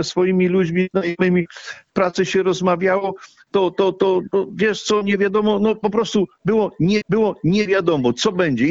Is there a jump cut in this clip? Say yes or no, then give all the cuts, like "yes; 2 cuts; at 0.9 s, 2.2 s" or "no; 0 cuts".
yes; 1 cut; at 7.0 s